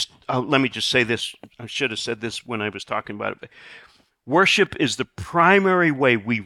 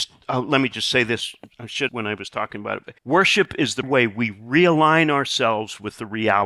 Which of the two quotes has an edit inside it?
second; 3 cuts; at 1.9 s, 3.0 s, 3.8 s

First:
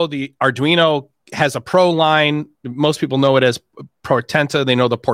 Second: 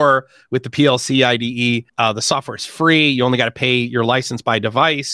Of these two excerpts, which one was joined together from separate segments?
second; 1 cut; at 1.9 s

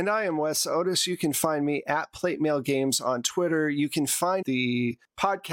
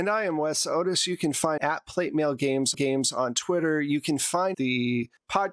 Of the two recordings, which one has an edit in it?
second; 2 cuts; at 1.6 s, 2.7 s

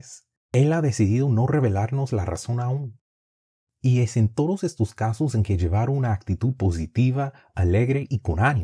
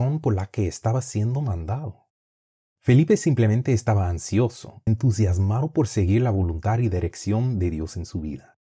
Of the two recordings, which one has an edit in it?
second; 1 cut; at 4.9 s

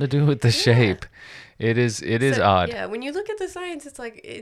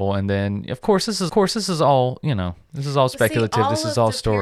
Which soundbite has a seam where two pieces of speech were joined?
second; 1 cut; at 1.3 s

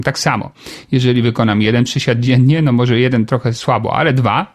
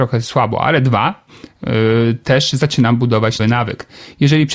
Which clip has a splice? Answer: second; 1 cut; at 3.4 s

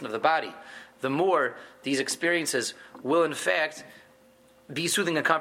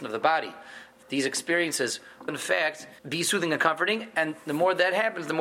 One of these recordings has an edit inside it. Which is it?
second; 3 cuts; at 1.0 s, 2.3 s, 3.0 s

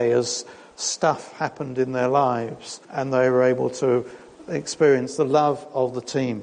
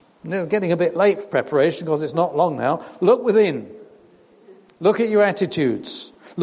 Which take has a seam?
first; 1 cut; at 2.8 s

